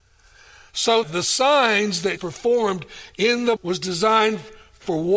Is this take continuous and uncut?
no; 3 cuts; at 1.0 s, 2.2 s, 3.6 s

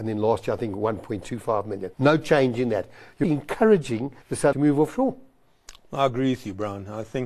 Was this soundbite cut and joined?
yes; 4 cuts; at 1.9 s, 3.2 s, 4.2 s, 4.5 s

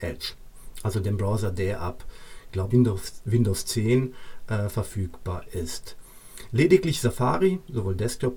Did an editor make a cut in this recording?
yes; 1 cut; at 2.7 s

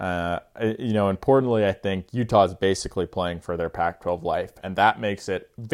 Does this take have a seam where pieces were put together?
no; 0 cuts

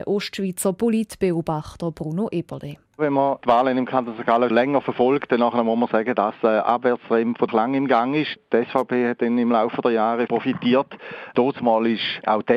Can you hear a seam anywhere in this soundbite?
yes; 4 cuts; at 2.8 s, 4.5 s, 7.5 s, 10.3 s

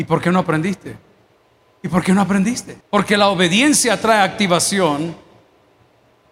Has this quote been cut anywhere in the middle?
yes; 2 cuts; at 1.4 s, 2.8 s

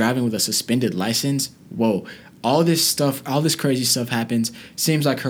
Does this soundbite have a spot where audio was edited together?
no; 0 cuts

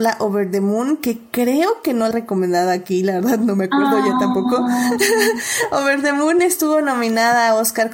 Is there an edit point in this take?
yes; 1 cut; at 2.1 s

